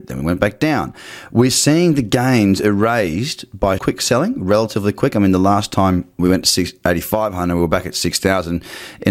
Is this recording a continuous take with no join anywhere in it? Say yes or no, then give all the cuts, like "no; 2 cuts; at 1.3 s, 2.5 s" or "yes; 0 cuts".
no; 2 cuts; at 3.8 s, 6.2 s